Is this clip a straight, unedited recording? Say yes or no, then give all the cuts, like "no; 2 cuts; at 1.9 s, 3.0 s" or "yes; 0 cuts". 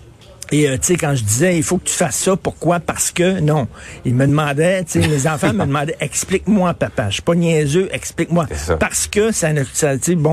yes; 0 cuts